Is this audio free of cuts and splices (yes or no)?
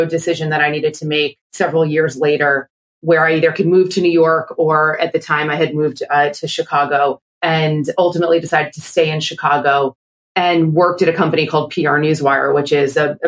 yes